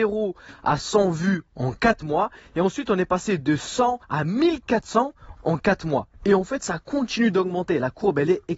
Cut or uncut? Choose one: cut